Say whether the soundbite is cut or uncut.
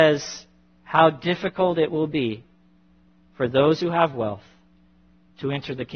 uncut